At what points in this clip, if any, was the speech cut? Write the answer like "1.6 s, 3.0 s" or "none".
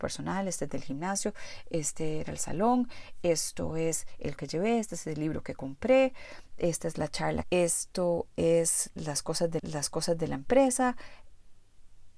4.4 s, 7.4 s, 9.6 s